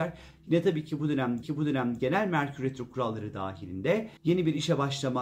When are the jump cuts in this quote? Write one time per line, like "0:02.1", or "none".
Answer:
0:01.4
0:04.2